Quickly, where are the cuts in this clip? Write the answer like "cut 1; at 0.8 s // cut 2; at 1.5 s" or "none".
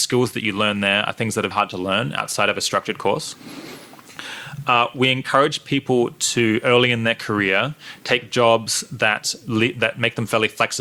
cut 1; at 1.5 s